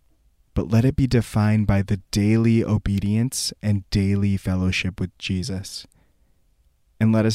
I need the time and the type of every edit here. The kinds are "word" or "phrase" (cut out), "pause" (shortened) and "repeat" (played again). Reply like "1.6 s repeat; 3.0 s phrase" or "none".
none